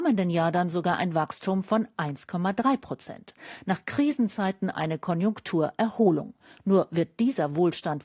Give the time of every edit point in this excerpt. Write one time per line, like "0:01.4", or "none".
0:04.7